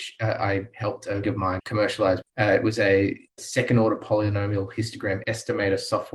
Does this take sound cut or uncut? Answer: cut